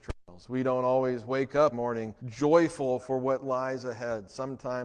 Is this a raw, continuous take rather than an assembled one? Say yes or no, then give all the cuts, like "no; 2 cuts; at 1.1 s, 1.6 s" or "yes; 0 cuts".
no; 2 cuts; at 1.7 s, 2.2 s